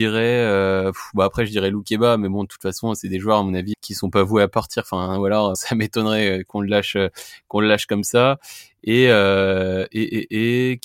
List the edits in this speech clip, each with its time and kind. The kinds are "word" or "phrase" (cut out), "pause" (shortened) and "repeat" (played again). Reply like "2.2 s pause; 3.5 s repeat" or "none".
3.7 s word; 5.5 s word